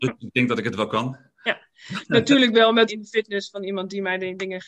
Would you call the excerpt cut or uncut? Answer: cut